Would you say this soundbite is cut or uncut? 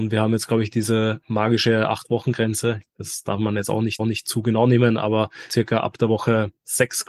cut